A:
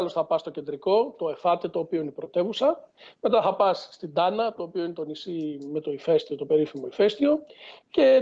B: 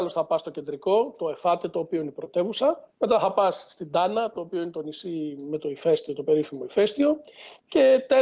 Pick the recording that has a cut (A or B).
B